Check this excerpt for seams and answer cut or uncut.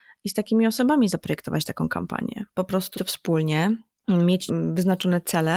cut